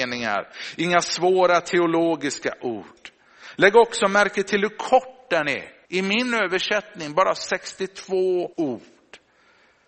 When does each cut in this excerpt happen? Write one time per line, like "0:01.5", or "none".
0:05.9
0:08.5